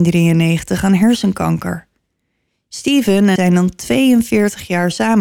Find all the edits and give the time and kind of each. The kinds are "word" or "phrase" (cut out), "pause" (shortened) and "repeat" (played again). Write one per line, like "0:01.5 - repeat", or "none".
0:03.4 - word